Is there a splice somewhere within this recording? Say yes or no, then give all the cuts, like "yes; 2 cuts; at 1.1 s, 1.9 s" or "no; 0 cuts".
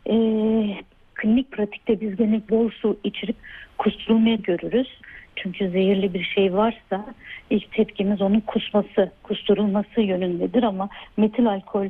yes; 2 cuts; at 2.5 s, 4.4 s